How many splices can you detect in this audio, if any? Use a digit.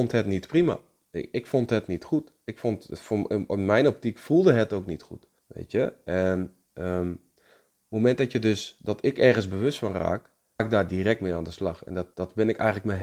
3